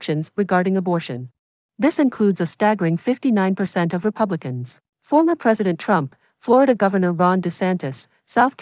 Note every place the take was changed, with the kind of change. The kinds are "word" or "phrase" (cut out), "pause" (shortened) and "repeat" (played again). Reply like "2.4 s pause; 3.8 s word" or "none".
1.4 s pause; 4.9 s pause

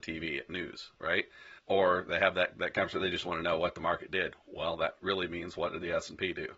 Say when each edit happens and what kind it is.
1.6 s pause

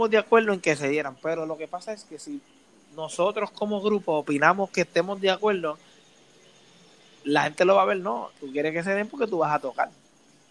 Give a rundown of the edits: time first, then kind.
none

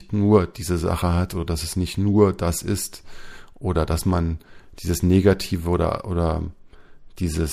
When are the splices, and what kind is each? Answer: none

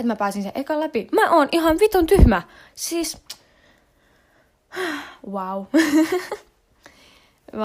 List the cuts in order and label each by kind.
none

